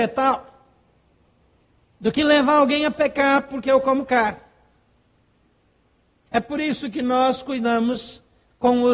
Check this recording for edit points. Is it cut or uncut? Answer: uncut